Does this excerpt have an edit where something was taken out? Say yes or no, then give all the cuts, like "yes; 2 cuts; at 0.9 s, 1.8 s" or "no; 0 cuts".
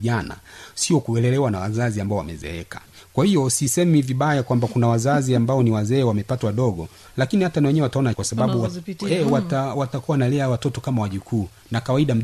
yes; 2 cuts; at 6.4 s, 8.1 s